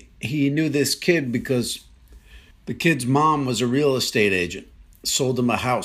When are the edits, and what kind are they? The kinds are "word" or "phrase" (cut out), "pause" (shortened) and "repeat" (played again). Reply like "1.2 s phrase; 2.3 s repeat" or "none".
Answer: 2.5 s pause